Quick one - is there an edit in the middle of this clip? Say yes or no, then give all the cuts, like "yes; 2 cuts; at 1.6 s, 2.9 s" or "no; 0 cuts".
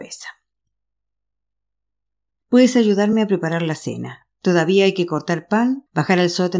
no; 0 cuts